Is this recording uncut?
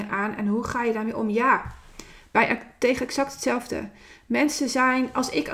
yes; 0 cuts

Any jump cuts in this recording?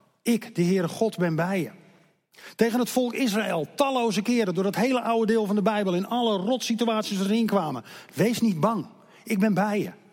no; 0 cuts

